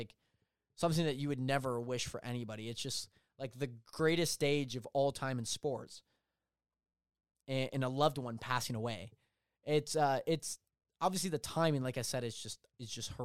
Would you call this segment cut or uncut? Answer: uncut